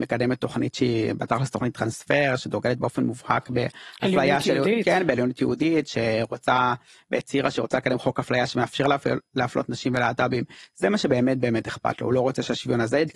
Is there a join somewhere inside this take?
no; 0 cuts

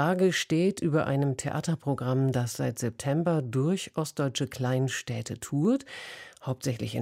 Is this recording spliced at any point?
no; 0 cuts

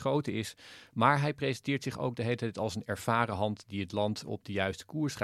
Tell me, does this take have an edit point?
no; 0 cuts

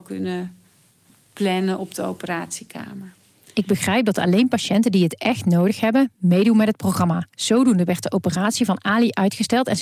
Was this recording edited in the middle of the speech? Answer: yes; 1 cut; at 7.3 s

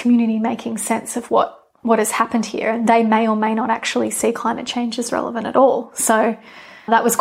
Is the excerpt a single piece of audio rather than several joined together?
yes; 0 cuts

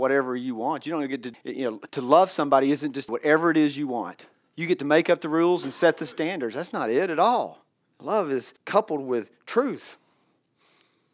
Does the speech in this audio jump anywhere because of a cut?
yes; 6 cuts; at 1.3 s, 1.9 s, 3.1 s, 4.3 s, 7.8 s, 8.6 s

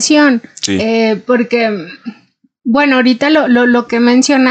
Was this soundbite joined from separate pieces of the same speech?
no; 0 cuts

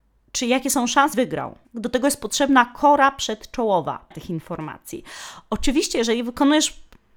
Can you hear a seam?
yes; 3 cuts; at 1.1 s, 1.6 s, 4.1 s

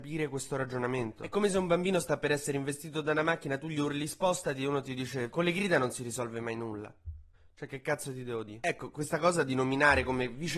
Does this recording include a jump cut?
yes; 1 cut; at 8.9 s

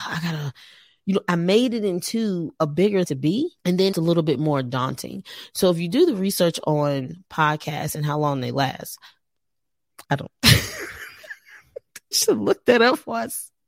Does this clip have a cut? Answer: yes; 5 cuts; at 3.0 s, 3.6 s, 3.9 s, 10.0 s, 12.1 s

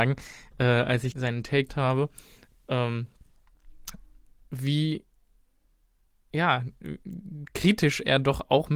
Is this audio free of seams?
no; 2 cuts; at 1.1 s, 1.7 s

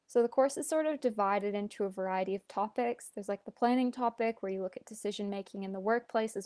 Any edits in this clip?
no; 0 cuts

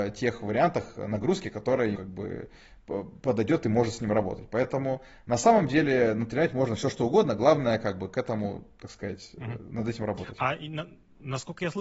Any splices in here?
yes; 1 cut; at 1.9 s

